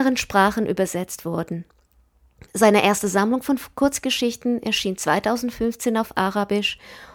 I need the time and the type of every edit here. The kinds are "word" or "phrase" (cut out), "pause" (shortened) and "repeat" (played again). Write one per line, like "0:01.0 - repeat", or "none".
none